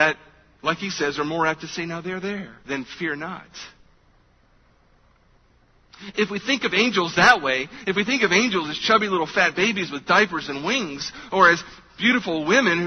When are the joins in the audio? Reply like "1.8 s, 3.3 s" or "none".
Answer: 2.6 s